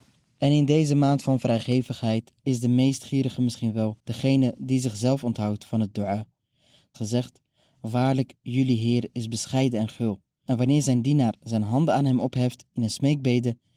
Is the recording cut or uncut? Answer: cut